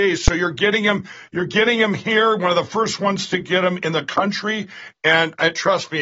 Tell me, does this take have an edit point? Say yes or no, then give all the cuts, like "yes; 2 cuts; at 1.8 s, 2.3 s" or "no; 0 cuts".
no; 0 cuts